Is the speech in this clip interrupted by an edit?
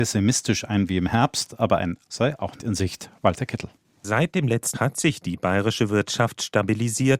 yes; 3 cuts; at 2.0 s, 2.6 s, 4.7 s

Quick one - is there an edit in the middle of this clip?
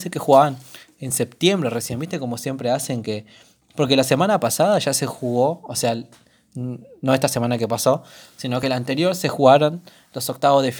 no; 0 cuts

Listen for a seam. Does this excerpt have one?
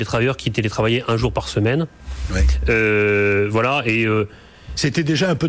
no; 0 cuts

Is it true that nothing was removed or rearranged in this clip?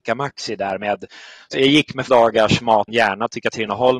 no; 3 cuts; at 1.5 s, 2.1 s, 2.9 s

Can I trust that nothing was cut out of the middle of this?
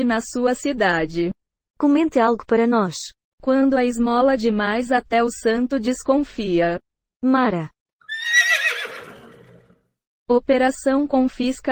yes; 0 cuts

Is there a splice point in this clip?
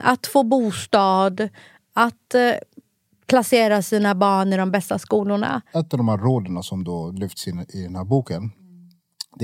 no; 0 cuts

